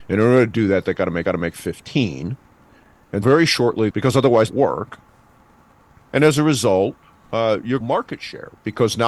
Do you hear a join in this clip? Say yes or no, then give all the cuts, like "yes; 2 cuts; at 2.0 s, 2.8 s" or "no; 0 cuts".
yes; 5 cuts; at 1.3 s, 3.2 s, 3.9 s, 4.5 s, 7.8 s